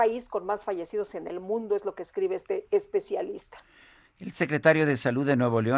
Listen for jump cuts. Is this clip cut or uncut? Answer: uncut